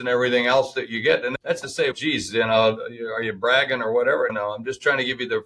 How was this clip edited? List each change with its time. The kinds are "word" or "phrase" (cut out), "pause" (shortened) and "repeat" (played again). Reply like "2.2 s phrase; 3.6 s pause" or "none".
1.6 s word